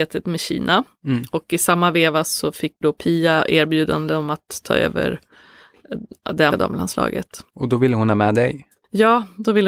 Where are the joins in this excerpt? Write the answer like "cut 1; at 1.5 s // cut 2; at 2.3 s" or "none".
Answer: cut 1; at 2.8 s // cut 2; at 6.5 s // cut 3; at 7.5 s